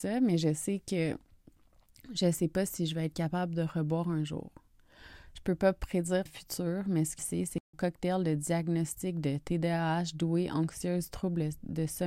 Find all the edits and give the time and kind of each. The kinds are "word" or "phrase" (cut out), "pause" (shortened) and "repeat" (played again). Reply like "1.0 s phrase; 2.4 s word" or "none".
6.3 s word; 7.2 s word; 7.7 s word